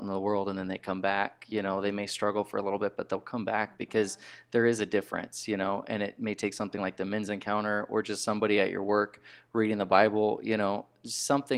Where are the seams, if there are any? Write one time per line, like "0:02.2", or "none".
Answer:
none